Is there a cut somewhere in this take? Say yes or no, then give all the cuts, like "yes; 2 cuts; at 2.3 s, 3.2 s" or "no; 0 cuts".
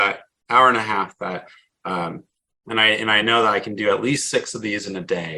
no; 0 cuts